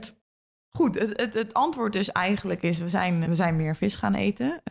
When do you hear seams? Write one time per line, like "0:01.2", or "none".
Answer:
0:03.2